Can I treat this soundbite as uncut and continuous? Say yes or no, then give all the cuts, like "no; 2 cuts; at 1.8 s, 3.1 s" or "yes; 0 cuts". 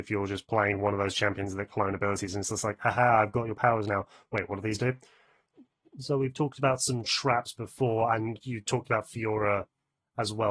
yes; 0 cuts